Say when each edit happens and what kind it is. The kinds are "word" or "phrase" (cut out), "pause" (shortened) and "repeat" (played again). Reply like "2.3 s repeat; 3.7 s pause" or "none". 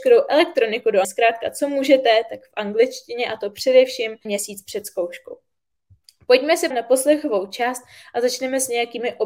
1.0 s word; 4.3 s word; 6.7 s word